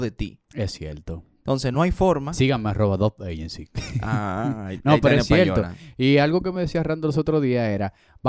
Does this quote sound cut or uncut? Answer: uncut